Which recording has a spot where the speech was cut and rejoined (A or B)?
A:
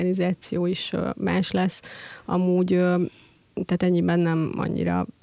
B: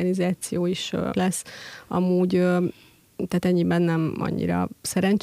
B